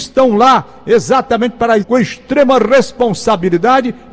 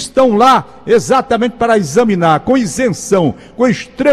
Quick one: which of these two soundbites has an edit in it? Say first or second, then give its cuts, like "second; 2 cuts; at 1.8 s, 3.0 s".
first; 1 cut; at 1.8 s